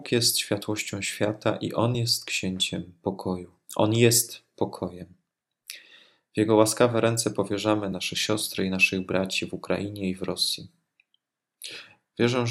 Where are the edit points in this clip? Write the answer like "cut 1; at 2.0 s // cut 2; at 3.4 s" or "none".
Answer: none

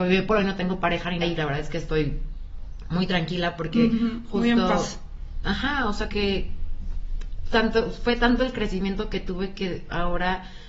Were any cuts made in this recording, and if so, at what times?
cut 1; at 1.2 s // cut 2; at 6.1 s

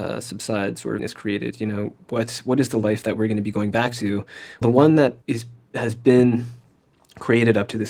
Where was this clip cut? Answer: cut 1; at 1.0 s // cut 2; at 4.6 s // cut 3; at 5.2 s

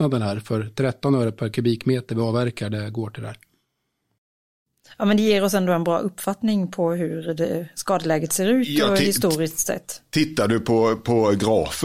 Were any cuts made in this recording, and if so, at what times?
none

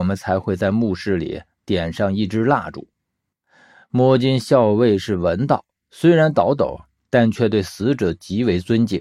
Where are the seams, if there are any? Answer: none

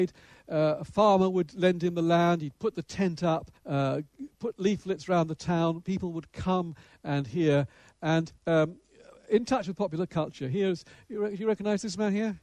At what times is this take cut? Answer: cut 1; at 3.6 s // cut 2; at 8.4 s

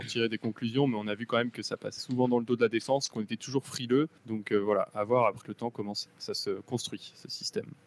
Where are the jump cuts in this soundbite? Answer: cut 1; at 2.0 s // cut 2; at 3.1 s // cut 3; at 4.2 s // cut 4; at 5.4 s // cut 5; at 6.1 s

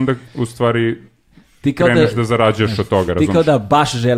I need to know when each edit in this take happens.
none

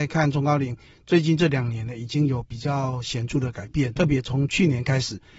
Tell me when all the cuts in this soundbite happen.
cut 1; at 4.0 s

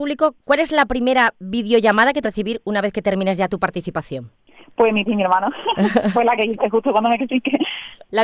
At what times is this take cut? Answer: cut 1; at 2.2 s // cut 2; at 5.1 s // cut 3; at 6.1 s // cut 4; at 7.2 s

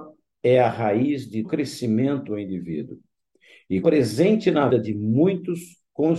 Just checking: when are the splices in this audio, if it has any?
cut 1; at 1.4 s // cut 2; at 2.3 s // cut 3; at 3.8 s // cut 4; at 4.7 s

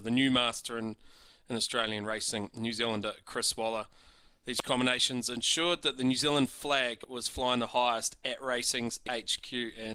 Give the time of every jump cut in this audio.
none

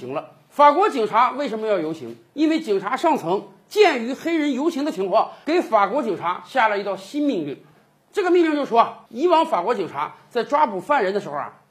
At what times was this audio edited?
none

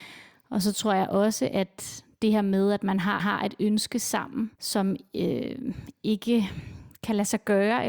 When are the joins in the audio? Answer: cut 1; at 3.2 s // cut 2; at 4.5 s

